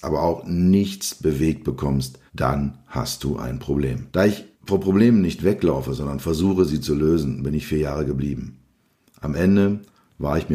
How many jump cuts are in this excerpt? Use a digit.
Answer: 3